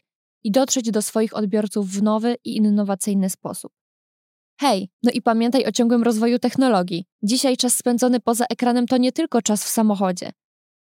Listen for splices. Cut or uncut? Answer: cut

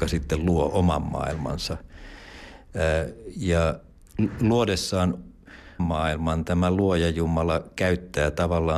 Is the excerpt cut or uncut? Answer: cut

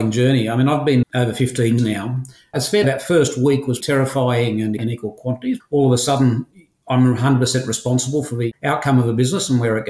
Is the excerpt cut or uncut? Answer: cut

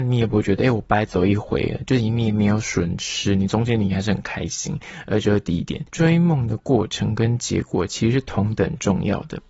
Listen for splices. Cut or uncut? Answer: cut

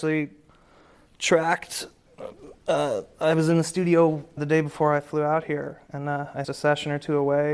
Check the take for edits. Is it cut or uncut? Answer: cut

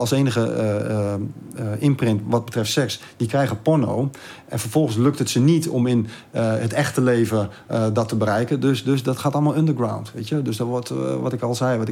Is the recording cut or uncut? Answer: uncut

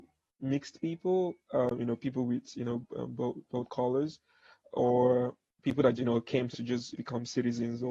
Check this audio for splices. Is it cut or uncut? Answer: cut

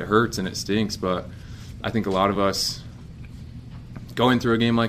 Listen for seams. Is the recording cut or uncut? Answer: uncut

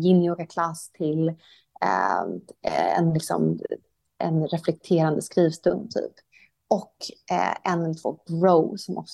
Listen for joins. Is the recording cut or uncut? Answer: uncut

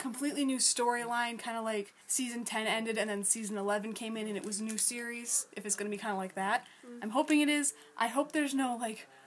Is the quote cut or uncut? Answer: cut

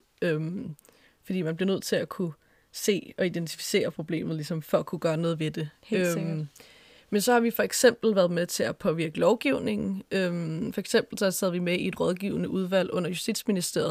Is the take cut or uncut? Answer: uncut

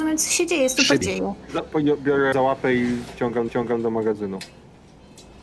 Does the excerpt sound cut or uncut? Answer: cut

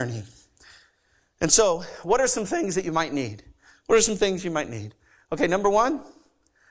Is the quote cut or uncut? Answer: uncut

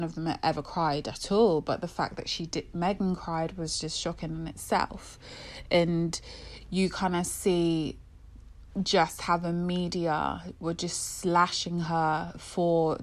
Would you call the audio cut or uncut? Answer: uncut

